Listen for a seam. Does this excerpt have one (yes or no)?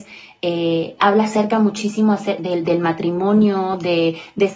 no